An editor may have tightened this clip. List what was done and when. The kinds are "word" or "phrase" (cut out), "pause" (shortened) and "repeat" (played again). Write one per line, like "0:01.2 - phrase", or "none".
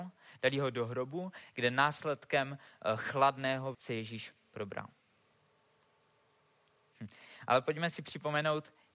0:03.7 - phrase